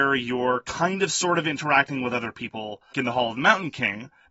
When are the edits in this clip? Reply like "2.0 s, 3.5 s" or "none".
2.9 s